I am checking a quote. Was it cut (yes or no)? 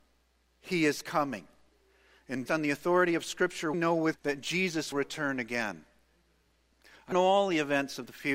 yes